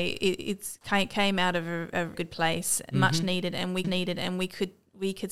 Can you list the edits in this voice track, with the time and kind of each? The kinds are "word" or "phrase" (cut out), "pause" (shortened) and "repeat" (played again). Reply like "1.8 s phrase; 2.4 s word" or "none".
2.1 s phrase; 3.8 s repeat